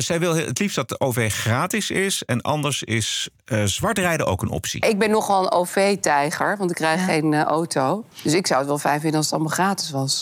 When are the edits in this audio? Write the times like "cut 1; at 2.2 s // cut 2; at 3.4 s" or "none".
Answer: cut 1; at 8.1 s